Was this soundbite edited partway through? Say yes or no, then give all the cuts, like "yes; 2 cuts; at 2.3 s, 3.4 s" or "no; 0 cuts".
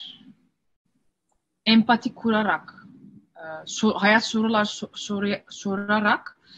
no; 0 cuts